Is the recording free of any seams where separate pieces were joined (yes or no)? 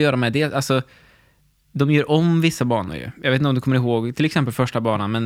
yes